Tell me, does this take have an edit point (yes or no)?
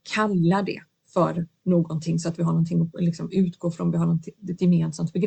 no